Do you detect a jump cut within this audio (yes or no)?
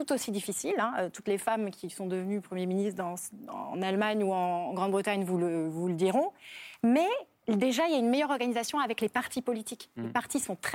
no